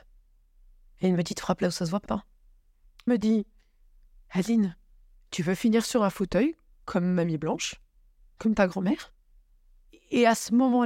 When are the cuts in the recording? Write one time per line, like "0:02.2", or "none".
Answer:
0:02.1
0:03.1